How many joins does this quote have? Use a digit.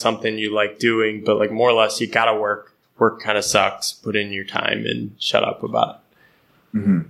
1